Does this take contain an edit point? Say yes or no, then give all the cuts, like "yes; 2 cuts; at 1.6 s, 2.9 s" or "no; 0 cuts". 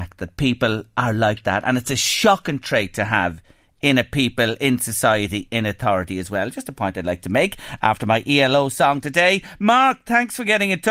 no; 0 cuts